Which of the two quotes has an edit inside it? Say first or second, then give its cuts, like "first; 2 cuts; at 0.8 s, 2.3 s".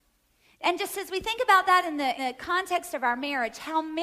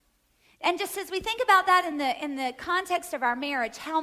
first; 1 cut; at 2.2 s